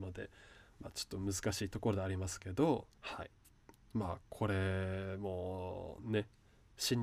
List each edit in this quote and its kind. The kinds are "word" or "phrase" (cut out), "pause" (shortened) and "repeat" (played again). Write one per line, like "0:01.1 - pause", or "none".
0:03.0 - pause